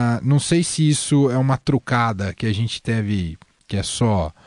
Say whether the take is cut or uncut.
uncut